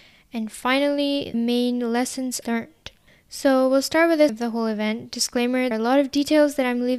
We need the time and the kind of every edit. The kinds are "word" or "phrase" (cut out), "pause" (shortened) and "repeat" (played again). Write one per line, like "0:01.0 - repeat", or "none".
0:01.3 - word
0:02.4 - word
0:04.3 - word
0:05.7 - word